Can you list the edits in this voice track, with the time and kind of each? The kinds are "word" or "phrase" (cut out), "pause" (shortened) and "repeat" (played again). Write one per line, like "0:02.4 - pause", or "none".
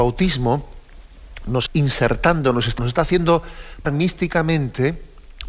0:01.7 - word
0:02.8 - word
0:03.8 - word